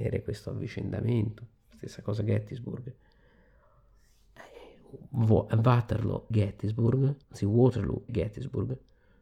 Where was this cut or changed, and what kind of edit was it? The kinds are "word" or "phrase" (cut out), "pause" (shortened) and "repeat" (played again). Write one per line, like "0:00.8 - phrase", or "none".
0:06.3 - word
0:07.2 - pause
0:08.1 - word